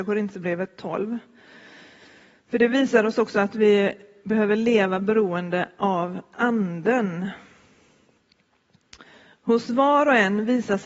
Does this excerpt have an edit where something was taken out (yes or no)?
no